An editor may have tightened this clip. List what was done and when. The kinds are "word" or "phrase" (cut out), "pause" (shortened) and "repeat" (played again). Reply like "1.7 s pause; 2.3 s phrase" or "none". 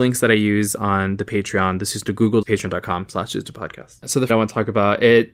2.4 s word; 4.3 s phrase